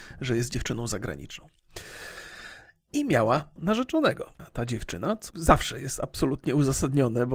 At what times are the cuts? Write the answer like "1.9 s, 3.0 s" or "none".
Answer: 3.6 s, 4.4 s, 5.3 s